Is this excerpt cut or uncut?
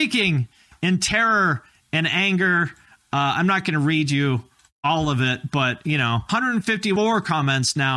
uncut